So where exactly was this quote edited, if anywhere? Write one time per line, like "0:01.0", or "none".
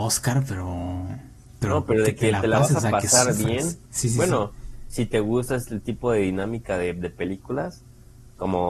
0:03.9